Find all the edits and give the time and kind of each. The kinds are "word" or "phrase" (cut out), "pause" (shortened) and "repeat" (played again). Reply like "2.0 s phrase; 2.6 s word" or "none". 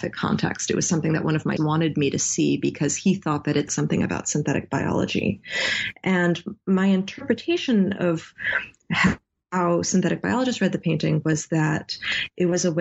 1.6 s word; 3.7 s word